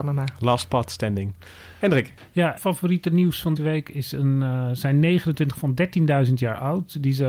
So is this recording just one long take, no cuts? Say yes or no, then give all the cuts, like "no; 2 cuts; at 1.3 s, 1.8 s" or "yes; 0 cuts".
no; 3 cuts; at 2.6 s, 3.6 s, 5.5 s